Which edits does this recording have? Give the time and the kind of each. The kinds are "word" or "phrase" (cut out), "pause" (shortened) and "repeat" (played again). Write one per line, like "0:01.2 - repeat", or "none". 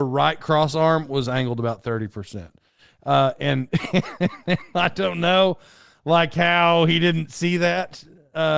none